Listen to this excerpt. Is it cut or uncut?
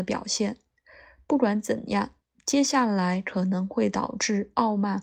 uncut